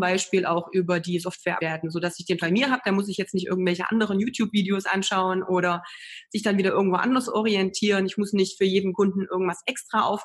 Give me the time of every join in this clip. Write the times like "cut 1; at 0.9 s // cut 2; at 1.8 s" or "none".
cut 1; at 1.6 s // cut 2; at 2.4 s